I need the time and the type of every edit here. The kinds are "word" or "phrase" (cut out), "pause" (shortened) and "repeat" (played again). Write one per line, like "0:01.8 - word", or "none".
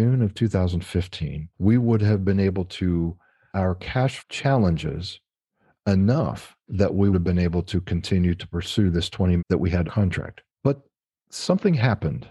0:01.5 - pause
0:03.5 - word
0:04.2 - word
0:07.1 - word
0:09.4 - word
0:09.8 - word
0:10.5 - pause